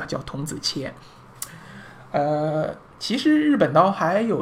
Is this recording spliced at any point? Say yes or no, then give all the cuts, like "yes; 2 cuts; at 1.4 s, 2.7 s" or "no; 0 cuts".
yes; 1 cut; at 2.9 s